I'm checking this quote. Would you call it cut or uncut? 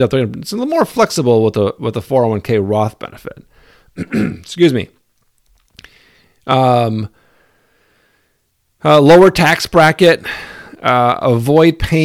uncut